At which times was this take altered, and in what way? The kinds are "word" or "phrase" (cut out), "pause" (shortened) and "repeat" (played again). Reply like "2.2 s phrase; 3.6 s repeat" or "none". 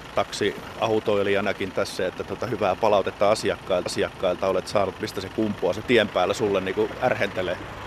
1.7 s word; 3.9 s repeat; 5.8 s phrase